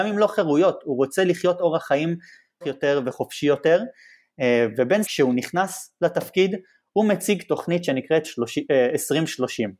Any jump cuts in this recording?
yes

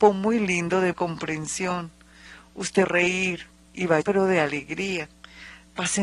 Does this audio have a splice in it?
yes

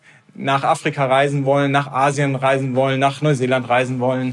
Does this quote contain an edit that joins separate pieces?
no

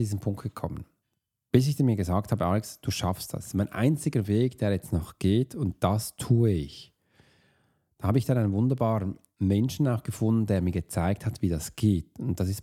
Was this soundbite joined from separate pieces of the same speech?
no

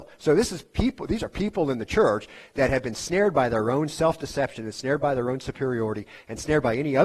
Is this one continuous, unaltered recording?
yes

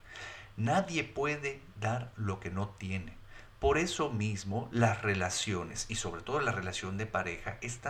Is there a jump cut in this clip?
no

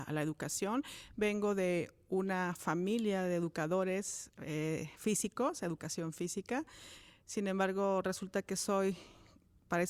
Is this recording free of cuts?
yes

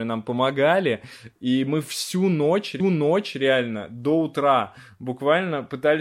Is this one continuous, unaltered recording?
no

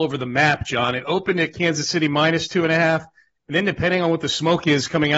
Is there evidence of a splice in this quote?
no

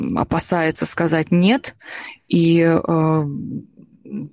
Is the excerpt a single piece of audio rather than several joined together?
yes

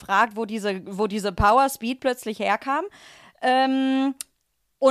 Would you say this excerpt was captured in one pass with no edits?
yes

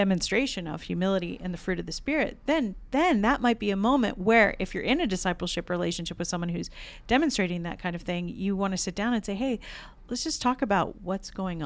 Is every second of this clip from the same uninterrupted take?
yes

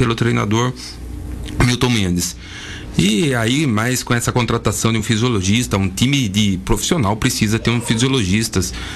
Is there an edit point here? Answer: no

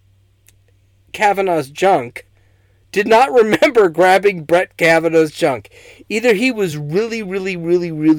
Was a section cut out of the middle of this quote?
no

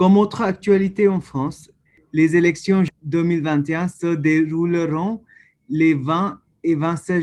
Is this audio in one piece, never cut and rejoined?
no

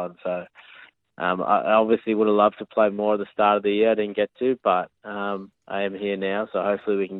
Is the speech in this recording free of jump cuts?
no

